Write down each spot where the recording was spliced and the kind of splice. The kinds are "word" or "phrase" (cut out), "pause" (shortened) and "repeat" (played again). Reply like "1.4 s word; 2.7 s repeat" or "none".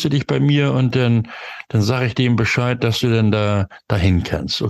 none